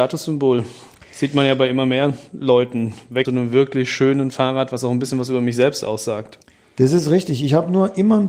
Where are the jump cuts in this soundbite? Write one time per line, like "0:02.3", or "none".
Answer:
0:03.3